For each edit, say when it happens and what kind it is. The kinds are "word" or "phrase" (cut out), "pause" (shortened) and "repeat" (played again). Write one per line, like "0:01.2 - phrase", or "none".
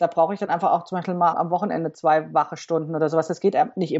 0:01.3 - word